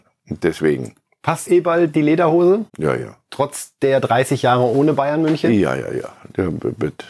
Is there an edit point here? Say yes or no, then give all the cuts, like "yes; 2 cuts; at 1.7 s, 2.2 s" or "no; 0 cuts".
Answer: yes; 2 cuts; at 1.5 s, 2.7 s